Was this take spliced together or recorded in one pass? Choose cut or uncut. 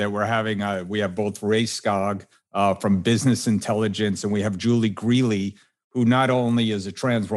uncut